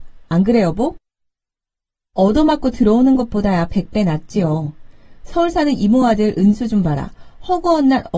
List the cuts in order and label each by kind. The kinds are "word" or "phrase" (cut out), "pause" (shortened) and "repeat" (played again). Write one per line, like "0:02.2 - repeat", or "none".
none

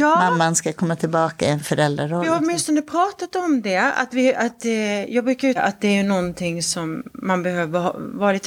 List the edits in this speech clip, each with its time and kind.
0:05.6 - phrase

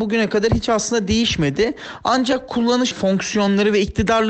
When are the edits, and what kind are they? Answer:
0:02.9 - word

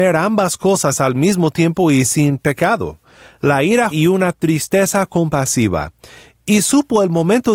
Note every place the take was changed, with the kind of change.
0:03.9 - word

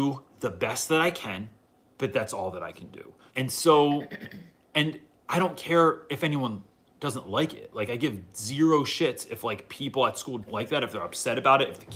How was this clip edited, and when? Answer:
0:03.3 - word
0:10.5 - word

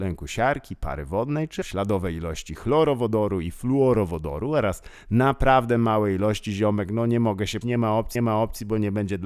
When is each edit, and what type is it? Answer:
0:01.6 - word
0:07.6 - word
0:08.1 - repeat

